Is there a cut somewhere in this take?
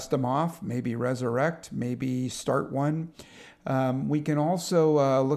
no; 0 cuts

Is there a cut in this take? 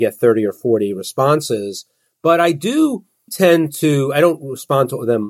no; 0 cuts

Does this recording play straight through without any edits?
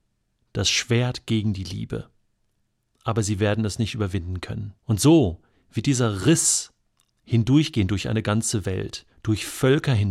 no; 1 cut; at 4.8 s

